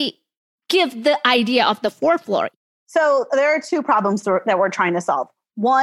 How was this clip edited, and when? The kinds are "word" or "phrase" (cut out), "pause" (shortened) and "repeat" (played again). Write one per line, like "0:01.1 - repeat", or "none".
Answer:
none

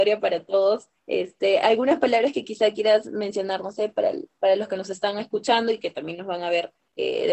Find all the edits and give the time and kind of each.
0:01.0 - pause

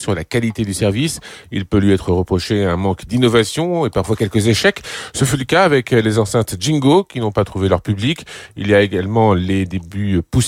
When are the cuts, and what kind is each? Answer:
none

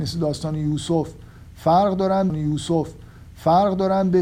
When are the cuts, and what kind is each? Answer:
0:02.3 - repeat

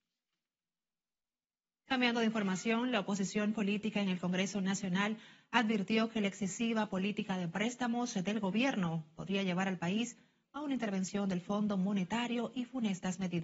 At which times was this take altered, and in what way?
none

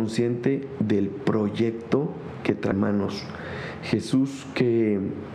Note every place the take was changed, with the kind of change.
0:02.7 - word

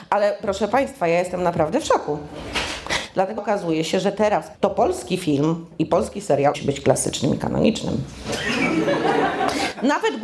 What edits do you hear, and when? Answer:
0:03.4 - word
0:04.5 - word
0:06.5 - word

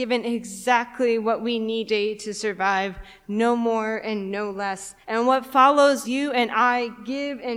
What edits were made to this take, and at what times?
0:01.9 - word
0:05.0 - pause
0:06.0 - word

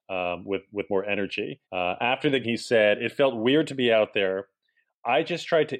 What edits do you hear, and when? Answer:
0:01.6 - pause
0:02.4 - word

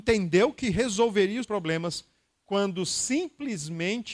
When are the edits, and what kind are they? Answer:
0:01.4 - word

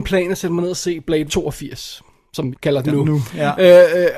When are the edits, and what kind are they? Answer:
0:01.3 - word
0:02.5 - word

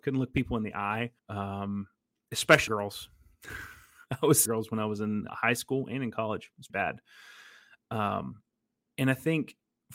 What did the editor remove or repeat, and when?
0:01.2 - pause
0:02.7 - word
0:04.5 - phrase
0:05.3 - word
0:06.7 - word
0:08.6 - pause

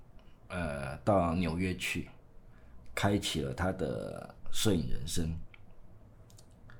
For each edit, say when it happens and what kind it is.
0:04.4 - pause

